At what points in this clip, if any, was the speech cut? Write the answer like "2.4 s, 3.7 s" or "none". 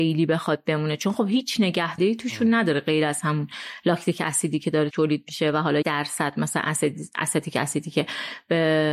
2.0 s, 4.9 s, 5.8 s